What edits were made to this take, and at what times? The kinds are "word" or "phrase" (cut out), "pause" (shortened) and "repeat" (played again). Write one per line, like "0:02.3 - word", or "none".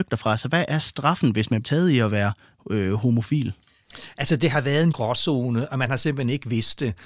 0:01.6 - word
0:04.9 - word